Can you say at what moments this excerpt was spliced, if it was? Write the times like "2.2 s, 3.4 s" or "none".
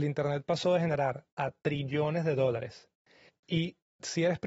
1.2 s